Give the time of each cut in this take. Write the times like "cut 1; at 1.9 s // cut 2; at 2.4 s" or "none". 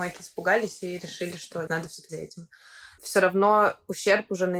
cut 1; at 1.7 s // cut 2; at 2.1 s // cut 3; at 3.0 s